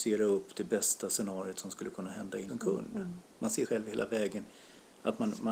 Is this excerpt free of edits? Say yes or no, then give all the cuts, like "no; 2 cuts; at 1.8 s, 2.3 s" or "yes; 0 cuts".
no; 2 cuts; at 2.5 s, 3.6 s